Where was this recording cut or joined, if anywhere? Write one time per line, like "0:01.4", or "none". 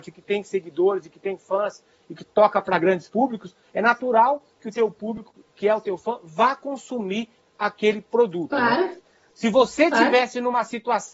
none